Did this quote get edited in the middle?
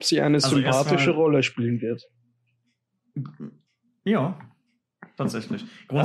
no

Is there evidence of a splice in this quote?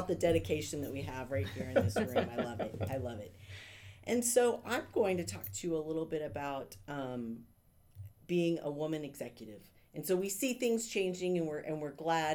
no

